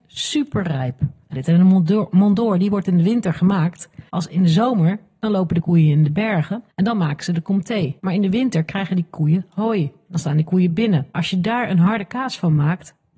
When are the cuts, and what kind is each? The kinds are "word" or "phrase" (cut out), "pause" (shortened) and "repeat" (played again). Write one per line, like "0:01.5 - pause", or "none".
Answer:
0:01.3 - phrase
0:04.1 - pause
0:06.7 - pause
0:08.0 - pause
0:11.1 - pause